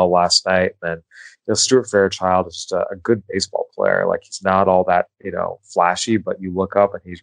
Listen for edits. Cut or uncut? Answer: uncut